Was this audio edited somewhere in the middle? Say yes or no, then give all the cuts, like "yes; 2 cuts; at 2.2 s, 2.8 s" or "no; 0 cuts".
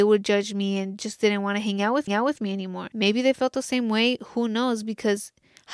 yes; 1 cut; at 2.1 s